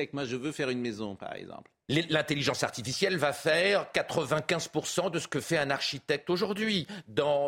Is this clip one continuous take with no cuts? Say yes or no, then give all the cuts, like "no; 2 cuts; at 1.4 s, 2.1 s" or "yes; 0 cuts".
yes; 0 cuts